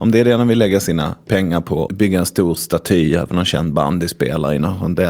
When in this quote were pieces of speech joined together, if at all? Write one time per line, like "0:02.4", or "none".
none

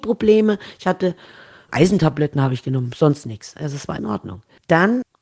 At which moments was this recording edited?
0:01.7
0:04.0

